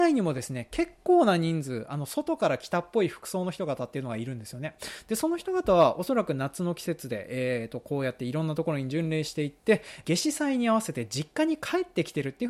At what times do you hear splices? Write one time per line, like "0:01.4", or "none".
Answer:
0:10.0